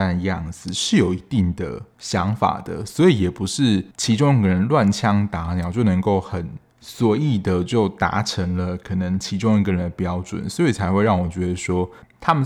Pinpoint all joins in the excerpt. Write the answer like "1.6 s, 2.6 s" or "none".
3.9 s